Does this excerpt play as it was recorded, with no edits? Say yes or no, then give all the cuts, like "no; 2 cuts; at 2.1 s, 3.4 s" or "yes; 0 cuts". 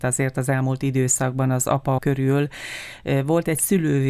no; 1 cut; at 2.0 s